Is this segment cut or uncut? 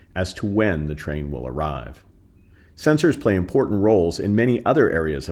uncut